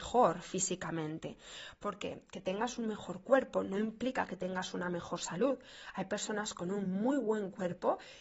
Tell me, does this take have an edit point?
no; 0 cuts

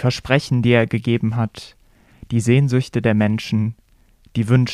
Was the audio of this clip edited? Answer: no; 0 cuts

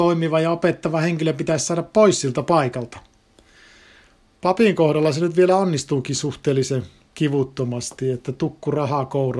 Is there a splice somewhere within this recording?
no; 0 cuts

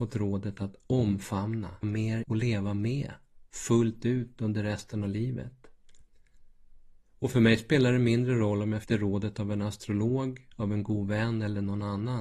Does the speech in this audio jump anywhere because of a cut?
yes; 3 cuts; at 1.8 s, 2.2 s, 8.8 s

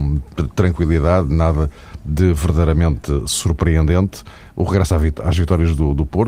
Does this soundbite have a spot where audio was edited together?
no; 0 cuts

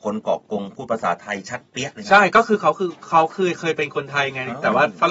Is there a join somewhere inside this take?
no; 0 cuts

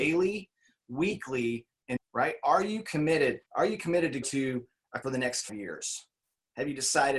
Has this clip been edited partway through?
yes; 5 cuts; at 2.0 s, 3.5 s, 4.2 s, 5.0 s, 5.5 s

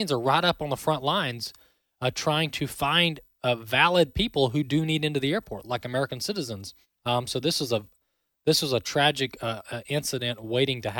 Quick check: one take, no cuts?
no; 1 cut; at 6.8 s

